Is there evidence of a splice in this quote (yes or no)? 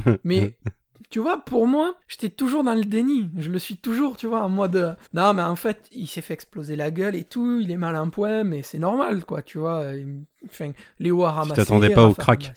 yes